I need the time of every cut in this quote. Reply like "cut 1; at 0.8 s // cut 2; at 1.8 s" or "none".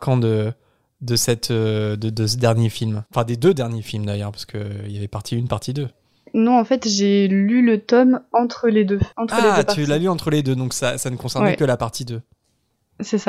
cut 1; at 3.1 s // cut 2; at 9.1 s